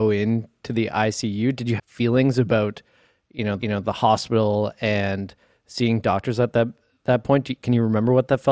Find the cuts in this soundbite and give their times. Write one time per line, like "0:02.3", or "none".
0:01.8
0:03.6